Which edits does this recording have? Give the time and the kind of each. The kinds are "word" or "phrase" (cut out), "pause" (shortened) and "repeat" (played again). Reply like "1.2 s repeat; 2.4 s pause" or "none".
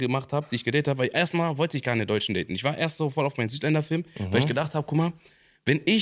none